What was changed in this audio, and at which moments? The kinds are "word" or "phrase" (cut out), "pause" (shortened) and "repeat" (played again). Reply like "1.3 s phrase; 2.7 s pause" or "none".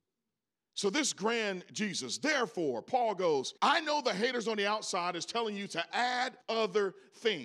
3.6 s pause; 6.4 s pause